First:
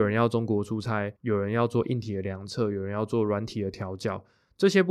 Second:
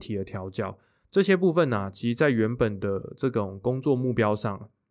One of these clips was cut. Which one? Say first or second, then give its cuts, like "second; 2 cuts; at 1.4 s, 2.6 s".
first; 1 cut; at 1.2 s